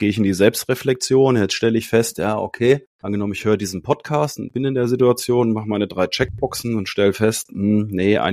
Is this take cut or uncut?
cut